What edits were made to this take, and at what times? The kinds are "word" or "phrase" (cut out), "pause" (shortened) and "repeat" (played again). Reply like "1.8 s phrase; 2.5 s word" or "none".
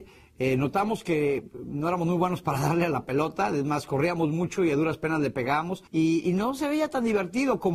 5.9 s pause